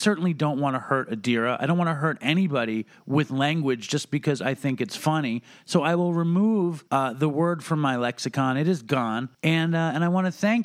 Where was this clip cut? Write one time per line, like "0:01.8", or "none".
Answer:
0:06.9
0:09.3

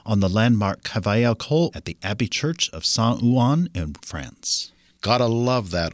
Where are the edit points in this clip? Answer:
0:01.7
0:04.0

